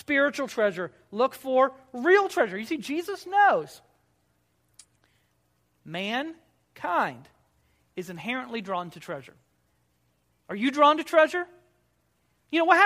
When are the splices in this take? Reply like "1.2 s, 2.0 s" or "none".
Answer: none